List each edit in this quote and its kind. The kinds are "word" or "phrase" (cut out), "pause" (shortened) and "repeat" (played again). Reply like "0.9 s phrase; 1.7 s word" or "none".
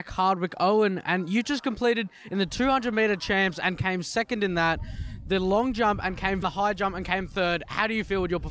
6.4 s phrase